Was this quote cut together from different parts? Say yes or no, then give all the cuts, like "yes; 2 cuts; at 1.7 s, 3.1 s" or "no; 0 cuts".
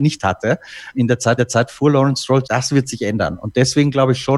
yes; 3 cuts; at 0.9 s, 1.4 s, 2.4 s